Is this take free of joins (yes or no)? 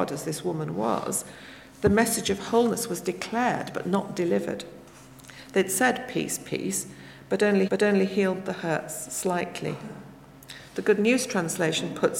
no